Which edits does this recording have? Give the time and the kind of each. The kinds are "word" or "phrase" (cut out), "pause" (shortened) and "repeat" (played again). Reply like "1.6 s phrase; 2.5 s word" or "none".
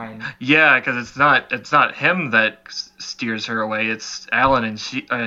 2.7 s word